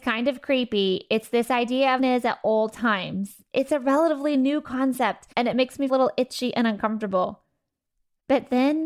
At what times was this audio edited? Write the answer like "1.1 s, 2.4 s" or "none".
2.0 s, 5.3 s, 5.9 s